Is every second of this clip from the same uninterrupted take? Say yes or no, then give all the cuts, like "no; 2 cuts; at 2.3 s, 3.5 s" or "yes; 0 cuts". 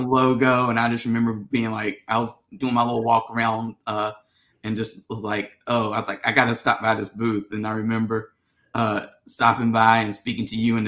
yes; 0 cuts